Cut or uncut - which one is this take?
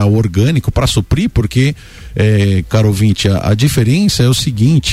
uncut